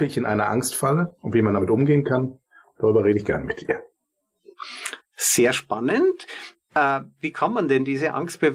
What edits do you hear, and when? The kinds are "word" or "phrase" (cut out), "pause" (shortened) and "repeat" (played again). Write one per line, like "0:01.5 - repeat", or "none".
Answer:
none